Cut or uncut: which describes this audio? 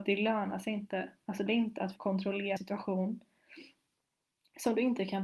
cut